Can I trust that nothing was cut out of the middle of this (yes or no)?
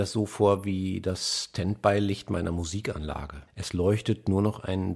no